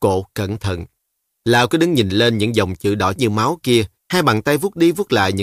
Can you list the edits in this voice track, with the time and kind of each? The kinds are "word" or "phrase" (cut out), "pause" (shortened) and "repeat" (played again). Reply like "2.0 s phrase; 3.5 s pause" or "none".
3.2 s word; 4.0 s pause